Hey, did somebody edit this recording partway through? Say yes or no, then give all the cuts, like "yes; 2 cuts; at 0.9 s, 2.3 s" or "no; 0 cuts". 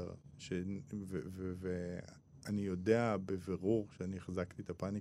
no; 0 cuts